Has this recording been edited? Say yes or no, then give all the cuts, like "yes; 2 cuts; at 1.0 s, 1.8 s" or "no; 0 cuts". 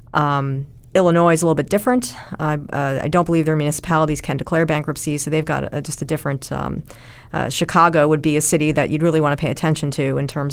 no; 0 cuts